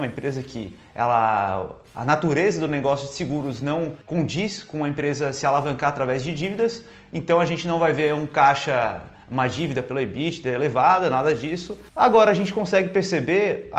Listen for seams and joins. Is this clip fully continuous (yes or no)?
no